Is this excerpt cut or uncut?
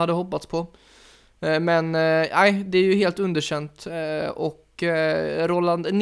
uncut